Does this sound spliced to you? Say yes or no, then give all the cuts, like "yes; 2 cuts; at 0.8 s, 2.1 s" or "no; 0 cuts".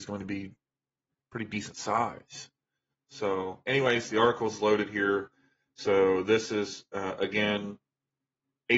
no; 0 cuts